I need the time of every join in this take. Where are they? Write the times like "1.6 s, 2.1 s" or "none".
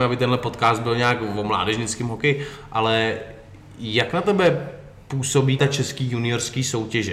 5.6 s